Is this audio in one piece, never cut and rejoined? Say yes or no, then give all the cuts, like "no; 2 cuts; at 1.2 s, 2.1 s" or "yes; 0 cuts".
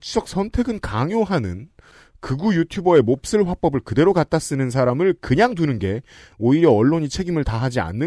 yes; 0 cuts